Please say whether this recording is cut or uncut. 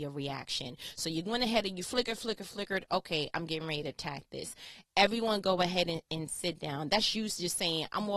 uncut